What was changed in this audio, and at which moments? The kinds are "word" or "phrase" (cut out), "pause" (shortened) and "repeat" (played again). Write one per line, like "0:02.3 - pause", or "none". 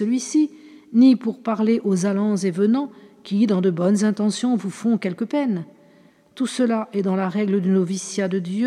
none